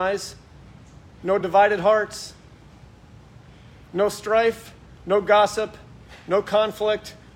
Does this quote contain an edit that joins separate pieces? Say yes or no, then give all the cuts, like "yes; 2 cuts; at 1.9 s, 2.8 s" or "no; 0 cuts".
no; 0 cuts